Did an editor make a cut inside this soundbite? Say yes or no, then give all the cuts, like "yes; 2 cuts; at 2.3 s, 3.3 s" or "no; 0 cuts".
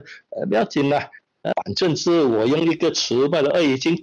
yes; 1 cut; at 1.5 s